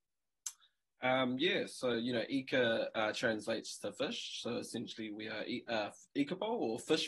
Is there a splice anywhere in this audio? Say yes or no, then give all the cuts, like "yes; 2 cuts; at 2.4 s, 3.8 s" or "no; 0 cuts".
no; 0 cuts